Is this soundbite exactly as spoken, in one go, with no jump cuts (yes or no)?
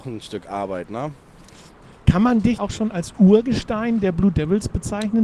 no